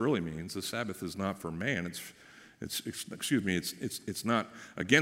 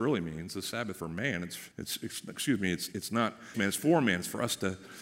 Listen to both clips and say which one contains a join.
second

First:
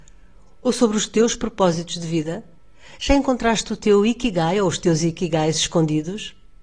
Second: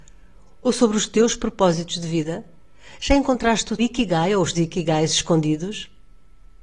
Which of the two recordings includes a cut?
second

